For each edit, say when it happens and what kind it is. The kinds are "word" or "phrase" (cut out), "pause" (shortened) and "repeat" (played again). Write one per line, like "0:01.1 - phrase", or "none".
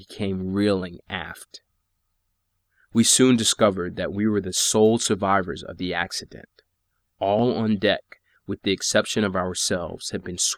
none